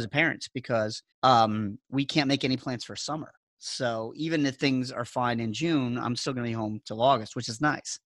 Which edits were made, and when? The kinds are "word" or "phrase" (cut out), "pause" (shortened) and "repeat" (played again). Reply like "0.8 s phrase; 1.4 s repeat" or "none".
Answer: 1.1 s pause; 3.4 s pause